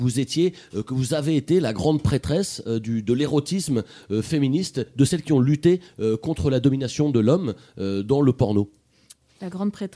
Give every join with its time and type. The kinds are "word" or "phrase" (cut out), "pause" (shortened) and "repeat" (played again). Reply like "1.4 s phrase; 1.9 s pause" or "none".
none